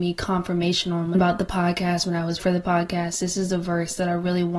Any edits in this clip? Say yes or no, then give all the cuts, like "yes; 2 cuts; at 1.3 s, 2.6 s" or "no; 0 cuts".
yes; 2 cuts; at 1.1 s, 2.4 s